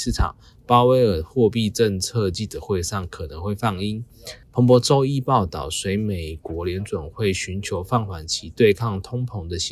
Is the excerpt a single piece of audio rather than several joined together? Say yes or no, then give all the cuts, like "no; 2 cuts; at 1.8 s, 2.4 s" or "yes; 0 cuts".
no; 1 cut; at 4.4 s